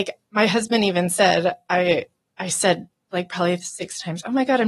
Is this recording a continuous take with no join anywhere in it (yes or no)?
yes